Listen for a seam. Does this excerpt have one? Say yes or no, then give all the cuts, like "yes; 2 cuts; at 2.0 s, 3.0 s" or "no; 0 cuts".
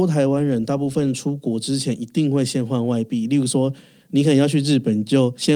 no; 0 cuts